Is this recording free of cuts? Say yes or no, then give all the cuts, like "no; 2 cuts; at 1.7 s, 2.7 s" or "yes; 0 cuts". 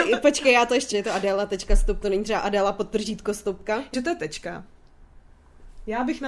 no; 3 cuts; at 0.9 s, 2.0 s, 3.9 s